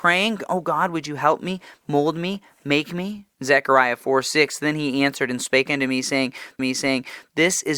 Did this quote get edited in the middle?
yes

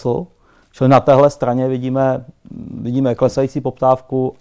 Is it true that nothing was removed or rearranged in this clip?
yes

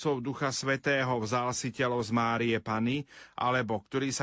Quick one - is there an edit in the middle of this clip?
no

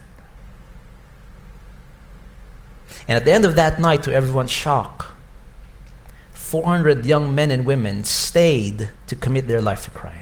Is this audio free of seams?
no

